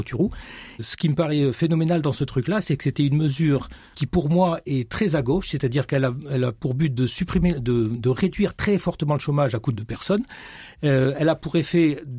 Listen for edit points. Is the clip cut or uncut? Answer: cut